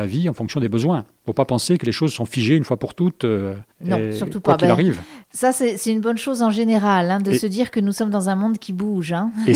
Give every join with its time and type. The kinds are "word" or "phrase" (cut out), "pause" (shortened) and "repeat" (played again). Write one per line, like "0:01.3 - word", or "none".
0:03.7 - pause
0:05.2 - pause